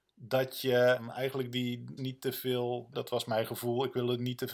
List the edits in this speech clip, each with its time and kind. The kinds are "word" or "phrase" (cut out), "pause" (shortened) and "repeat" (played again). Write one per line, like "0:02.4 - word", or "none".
0:02.0 - word
0:02.9 - word